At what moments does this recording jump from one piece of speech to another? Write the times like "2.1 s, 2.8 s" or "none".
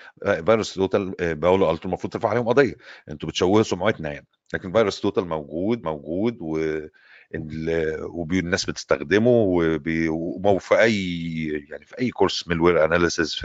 5.8 s